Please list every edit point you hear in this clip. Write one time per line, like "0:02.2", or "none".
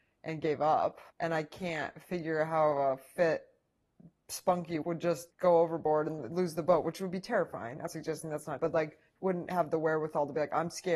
0:01.1
0:04.8
0:05.3
0:07.9
0:08.6